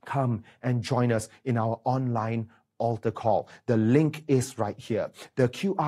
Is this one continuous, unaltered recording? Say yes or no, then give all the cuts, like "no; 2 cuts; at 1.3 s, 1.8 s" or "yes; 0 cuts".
yes; 0 cuts